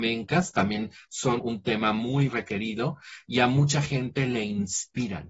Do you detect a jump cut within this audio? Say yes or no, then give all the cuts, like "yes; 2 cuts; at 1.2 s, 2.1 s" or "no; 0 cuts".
yes; 2 cuts; at 1.4 s, 2.3 s